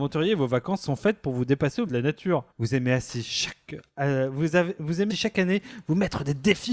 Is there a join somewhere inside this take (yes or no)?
yes